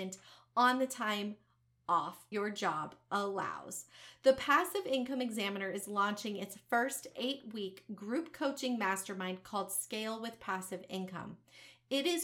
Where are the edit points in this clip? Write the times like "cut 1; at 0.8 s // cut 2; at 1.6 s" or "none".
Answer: cut 1; at 2.3 s